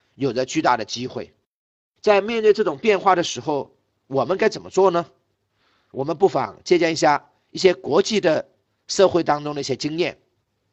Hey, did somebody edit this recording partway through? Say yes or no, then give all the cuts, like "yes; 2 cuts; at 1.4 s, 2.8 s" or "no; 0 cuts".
no; 0 cuts